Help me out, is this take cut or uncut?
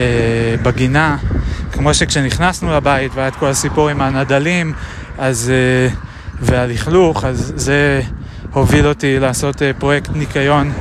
uncut